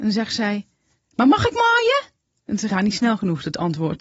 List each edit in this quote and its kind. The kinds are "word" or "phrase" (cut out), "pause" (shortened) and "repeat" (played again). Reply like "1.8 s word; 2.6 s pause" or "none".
2.3 s pause; 2.7 s word